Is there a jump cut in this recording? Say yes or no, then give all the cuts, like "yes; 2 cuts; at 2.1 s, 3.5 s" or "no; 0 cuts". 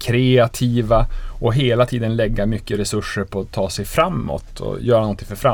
no; 0 cuts